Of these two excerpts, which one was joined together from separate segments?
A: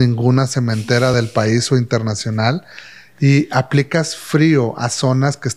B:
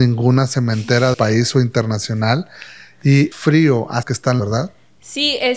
B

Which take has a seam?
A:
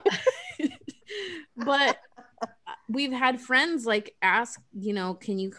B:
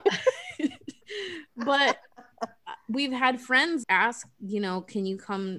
B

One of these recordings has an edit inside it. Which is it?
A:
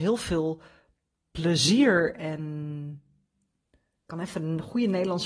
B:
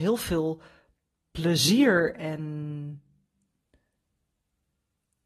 A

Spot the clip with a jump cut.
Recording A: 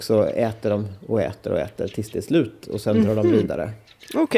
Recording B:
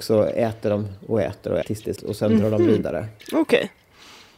B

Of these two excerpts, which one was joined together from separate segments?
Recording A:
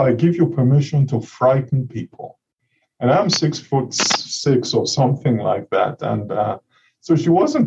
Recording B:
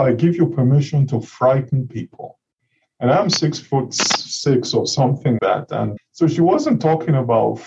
B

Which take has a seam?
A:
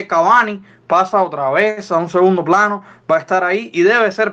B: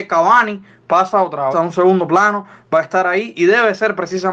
B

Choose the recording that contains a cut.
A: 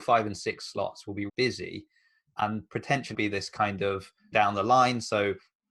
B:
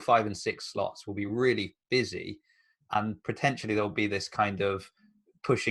A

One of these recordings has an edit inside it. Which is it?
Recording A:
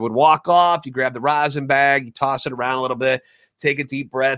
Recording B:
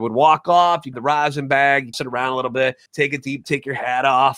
B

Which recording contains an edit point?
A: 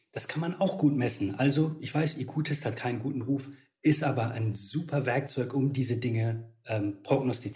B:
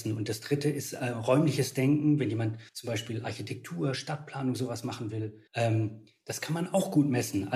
B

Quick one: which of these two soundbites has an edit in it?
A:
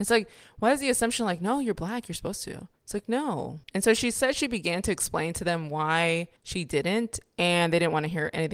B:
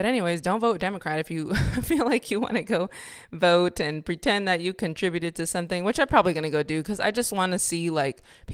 A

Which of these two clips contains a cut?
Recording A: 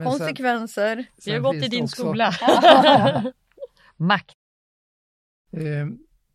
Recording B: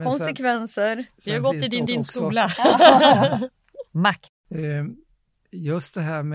B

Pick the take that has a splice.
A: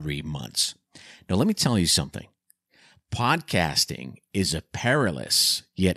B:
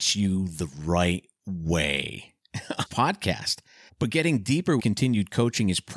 B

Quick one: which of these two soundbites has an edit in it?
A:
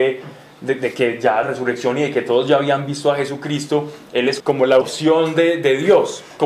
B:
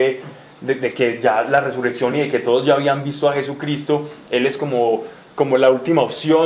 A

